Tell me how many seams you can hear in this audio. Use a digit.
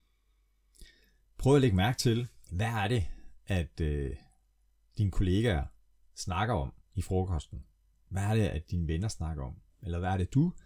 2